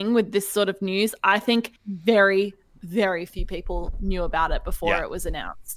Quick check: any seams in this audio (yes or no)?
yes